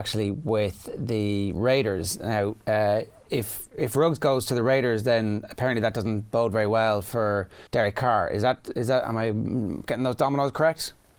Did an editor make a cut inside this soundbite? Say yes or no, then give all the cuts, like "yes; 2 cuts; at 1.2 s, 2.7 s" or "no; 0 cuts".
yes; 1 cut; at 7.7 s